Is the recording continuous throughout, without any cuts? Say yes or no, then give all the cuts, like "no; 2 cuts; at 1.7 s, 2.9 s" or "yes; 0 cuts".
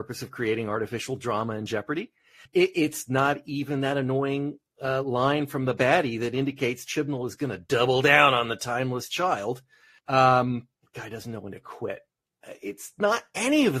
no; 1 cut; at 10.8 s